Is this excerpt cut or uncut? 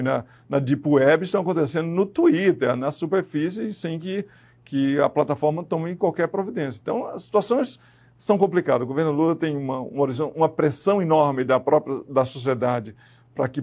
uncut